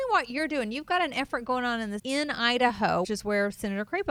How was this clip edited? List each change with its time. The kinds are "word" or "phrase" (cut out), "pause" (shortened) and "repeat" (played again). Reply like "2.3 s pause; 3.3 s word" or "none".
2.0 s word; 3.0 s word